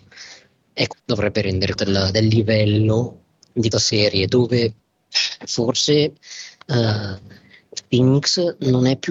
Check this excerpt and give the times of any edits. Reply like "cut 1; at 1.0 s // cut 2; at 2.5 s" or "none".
cut 1; at 0.9 s // cut 2; at 1.8 s // cut 3; at 3.7 s